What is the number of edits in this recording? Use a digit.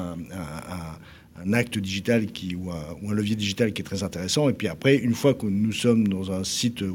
0